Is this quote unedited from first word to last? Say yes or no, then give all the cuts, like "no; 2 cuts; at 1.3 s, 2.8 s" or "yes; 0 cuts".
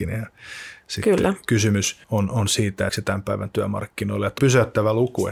no; 3 cuts; at 2.0 s, 2.9 s, 4.4 s